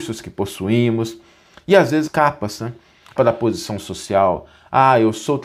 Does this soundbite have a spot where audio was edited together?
yes; 2 cuts; at 2.1 s, 3.2 s

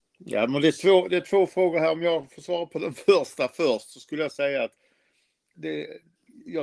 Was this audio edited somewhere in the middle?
yes; 1 cut; at 5.5 s

